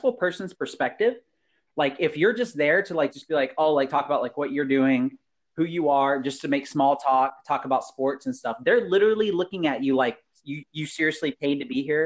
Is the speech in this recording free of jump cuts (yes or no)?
yes